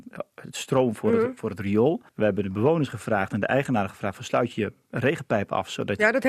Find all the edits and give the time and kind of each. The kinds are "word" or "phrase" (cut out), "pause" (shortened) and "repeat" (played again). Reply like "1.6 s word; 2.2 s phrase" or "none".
2.1 s pause